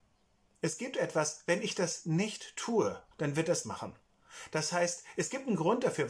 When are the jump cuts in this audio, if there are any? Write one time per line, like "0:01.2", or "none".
0:03.1
0:03.6